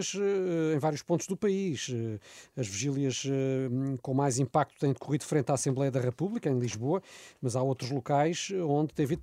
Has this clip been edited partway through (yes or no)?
no